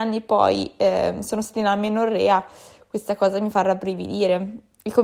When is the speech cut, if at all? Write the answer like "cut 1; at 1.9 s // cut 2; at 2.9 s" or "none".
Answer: none